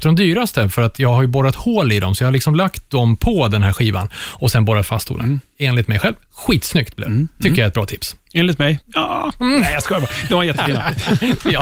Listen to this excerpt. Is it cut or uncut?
uncut